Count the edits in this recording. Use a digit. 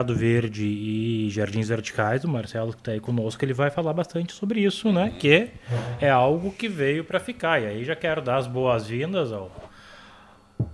0